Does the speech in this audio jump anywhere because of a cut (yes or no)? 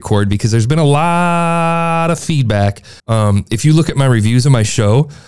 yes